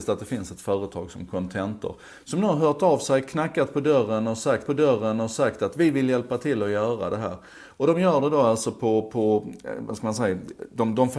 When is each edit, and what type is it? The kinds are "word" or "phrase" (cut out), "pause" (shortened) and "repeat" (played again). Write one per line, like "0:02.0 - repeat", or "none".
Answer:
0:04.7 - repeat